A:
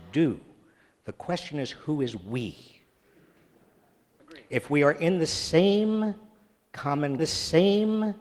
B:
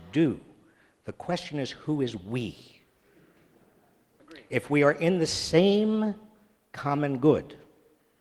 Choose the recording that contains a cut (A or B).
A